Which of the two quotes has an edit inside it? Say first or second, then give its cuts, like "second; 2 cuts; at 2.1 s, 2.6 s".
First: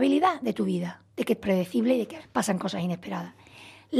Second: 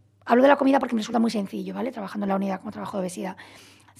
first; 3 cuts; at 1.1 s, 1.4 s, 2.2 s